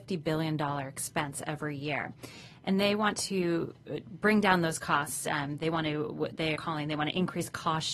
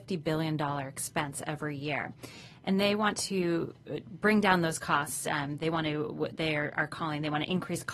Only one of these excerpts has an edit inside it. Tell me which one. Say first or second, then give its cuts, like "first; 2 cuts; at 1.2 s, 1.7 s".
first; 1 cut; at 6.5 s